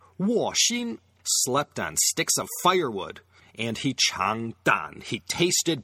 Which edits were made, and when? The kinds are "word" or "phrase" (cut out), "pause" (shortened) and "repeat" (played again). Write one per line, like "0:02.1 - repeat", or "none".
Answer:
none